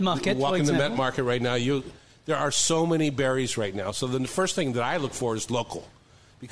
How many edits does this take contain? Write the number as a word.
zero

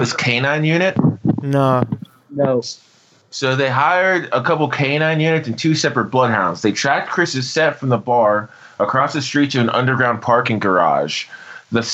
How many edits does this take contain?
zero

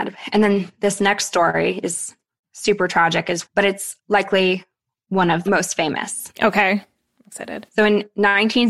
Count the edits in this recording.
two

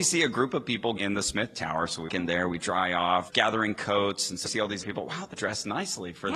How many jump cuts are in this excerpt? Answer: six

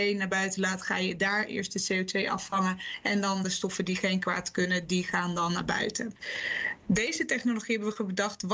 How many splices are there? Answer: zero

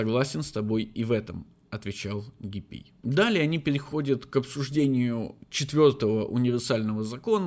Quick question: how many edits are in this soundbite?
one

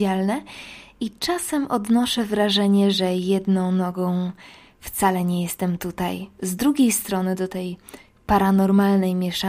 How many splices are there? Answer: zero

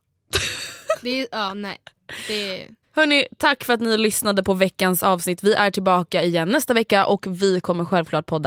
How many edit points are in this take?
one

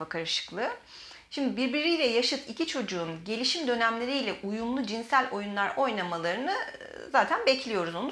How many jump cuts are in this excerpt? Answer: zero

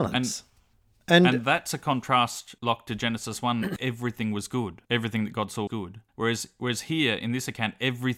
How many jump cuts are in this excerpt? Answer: five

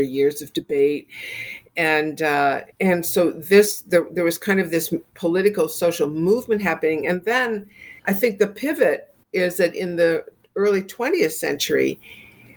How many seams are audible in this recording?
three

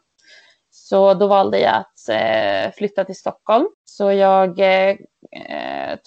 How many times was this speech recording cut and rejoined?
one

